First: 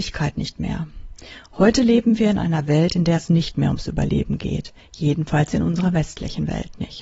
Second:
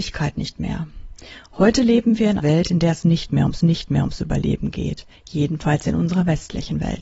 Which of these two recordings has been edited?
second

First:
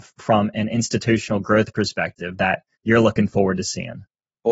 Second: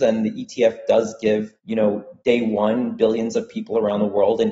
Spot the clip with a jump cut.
second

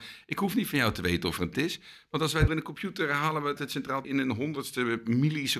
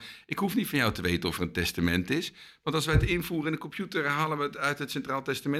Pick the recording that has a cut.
first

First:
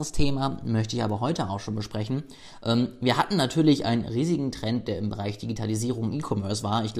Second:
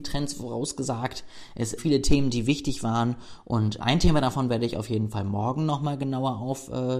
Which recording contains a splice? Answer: second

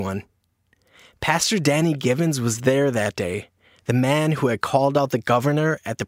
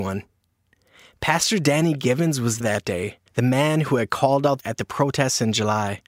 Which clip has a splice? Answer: second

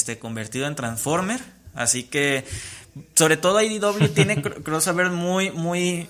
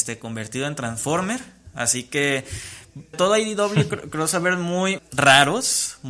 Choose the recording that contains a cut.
second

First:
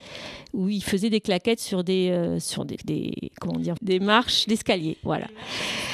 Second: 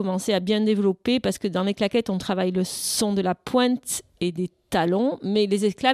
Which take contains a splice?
first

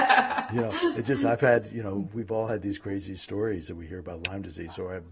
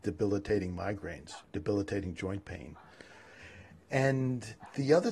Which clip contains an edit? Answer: second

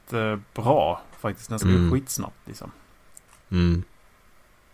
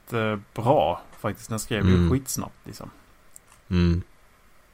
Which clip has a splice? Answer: first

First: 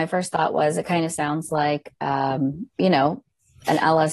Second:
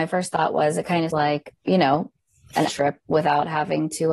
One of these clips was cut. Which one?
second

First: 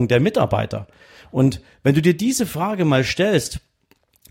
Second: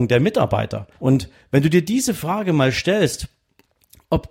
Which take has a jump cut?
second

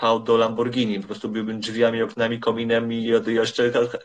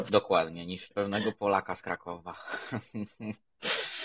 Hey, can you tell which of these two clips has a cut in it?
second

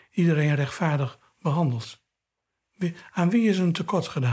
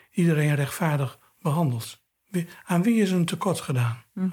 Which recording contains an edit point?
second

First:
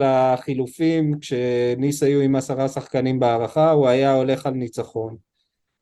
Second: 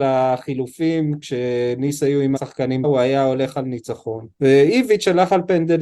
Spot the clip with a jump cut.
second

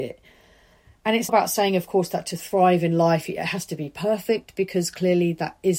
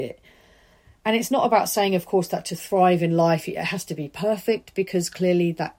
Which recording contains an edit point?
first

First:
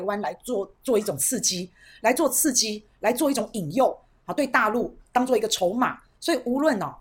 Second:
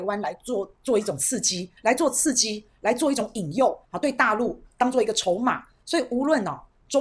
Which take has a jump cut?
second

